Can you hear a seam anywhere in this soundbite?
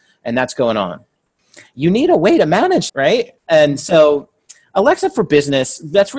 yes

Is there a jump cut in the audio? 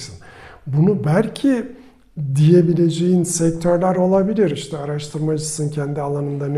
no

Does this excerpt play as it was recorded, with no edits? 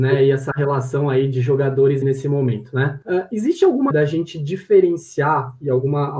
no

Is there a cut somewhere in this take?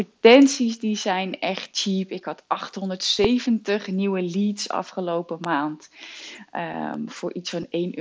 no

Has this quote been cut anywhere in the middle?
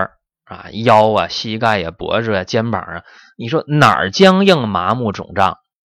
no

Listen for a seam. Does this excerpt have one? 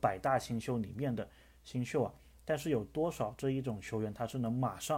no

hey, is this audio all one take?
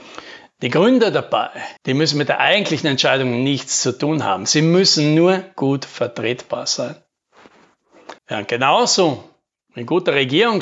no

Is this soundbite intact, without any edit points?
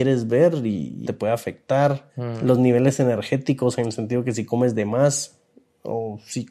no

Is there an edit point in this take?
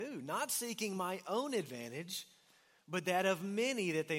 no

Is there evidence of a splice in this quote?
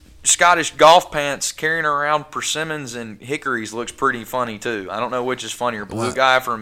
no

